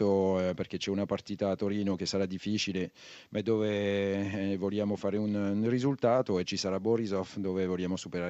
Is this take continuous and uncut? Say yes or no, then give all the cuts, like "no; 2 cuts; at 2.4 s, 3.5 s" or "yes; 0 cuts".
yes; 0 cuts